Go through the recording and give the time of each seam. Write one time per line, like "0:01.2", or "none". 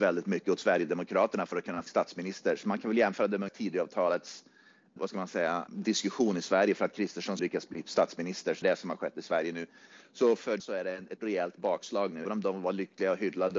0:01.9
0:03.5
0:05.0
0:05.7
0:07.4
0:08.6
0:10.6
0:11.2
0:12.2